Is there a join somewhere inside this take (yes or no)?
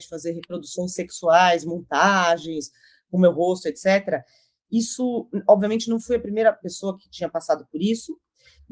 no